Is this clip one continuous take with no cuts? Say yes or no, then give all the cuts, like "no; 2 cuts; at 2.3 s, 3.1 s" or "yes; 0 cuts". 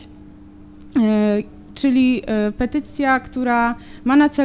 yes; 0 cuts